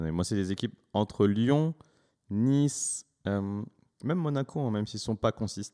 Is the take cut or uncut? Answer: uncut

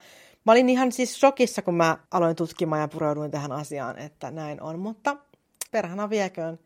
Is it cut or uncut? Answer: cut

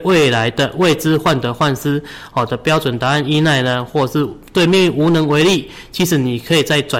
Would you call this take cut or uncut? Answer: uncut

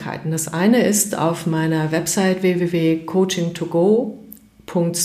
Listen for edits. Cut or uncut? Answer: uncut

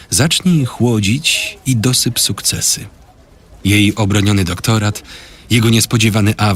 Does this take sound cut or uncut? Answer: uncut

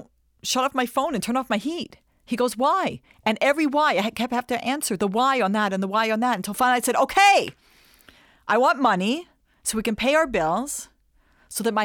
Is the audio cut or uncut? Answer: uncut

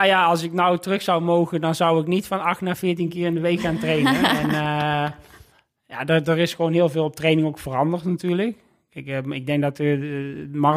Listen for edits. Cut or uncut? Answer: uncut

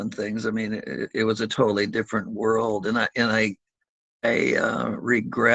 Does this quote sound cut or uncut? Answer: uncut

